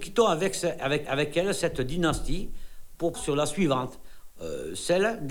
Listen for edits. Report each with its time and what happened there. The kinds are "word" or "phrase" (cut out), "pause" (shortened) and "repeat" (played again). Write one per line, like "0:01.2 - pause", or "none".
0:01.1 - repeat
0:03.1 - phrase